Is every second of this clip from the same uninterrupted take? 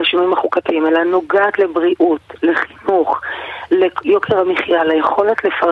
yes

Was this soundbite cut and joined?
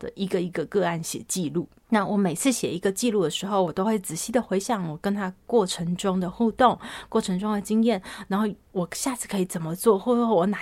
no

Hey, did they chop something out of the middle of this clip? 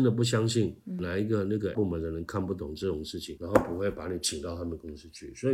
yes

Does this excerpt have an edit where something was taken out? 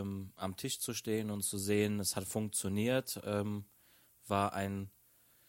no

